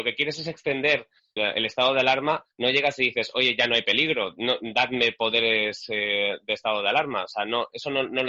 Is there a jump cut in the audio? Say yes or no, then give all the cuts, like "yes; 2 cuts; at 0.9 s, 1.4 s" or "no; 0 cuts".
yes; 1 cut; at 1.4 s